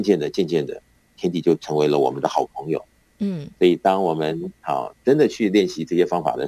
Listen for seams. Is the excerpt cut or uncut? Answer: uncut